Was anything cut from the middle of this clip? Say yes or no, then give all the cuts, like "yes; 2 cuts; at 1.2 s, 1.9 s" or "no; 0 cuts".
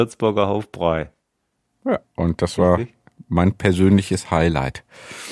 yes; 1 cut; at 2.1 s